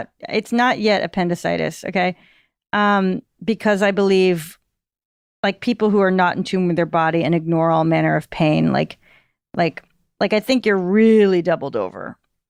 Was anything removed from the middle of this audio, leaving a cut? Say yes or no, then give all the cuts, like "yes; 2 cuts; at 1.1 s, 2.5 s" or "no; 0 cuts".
no; 0 cuts